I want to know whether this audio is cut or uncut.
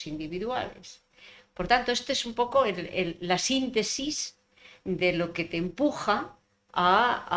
uncut